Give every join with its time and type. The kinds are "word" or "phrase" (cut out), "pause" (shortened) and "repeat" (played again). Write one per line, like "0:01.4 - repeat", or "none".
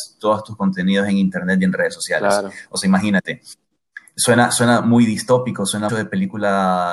0:05.9 - word